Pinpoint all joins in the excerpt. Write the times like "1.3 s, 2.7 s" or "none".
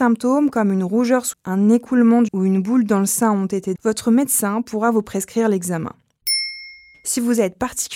1.3 s, 2.3 s, 3.8 s